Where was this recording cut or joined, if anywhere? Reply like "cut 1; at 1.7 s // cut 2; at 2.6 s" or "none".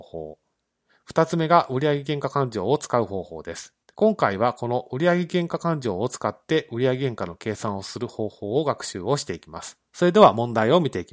cut 1; at 3.8 s

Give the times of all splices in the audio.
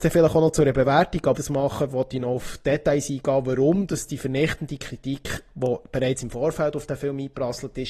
cut 1; at 1.3 s

